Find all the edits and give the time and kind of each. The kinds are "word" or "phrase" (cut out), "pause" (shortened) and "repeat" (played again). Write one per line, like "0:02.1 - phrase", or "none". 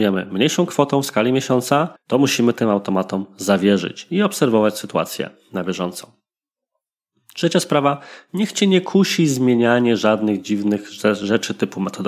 0:02.0 - pause